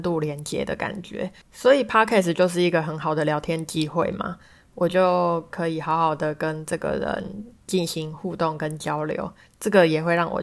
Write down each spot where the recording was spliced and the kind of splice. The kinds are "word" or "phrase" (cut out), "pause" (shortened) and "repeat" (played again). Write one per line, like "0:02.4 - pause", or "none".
0:01.4 - pause